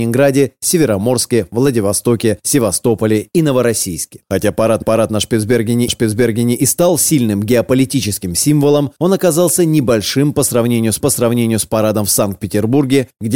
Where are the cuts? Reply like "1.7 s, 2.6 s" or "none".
4.8 s, 5.9 s, 11.0 s